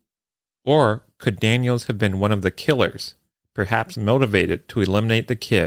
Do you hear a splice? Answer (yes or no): no